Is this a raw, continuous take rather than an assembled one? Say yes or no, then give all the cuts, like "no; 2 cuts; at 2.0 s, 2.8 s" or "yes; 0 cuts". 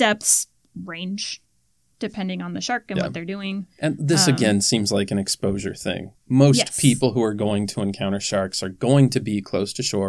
yes; 0 cuts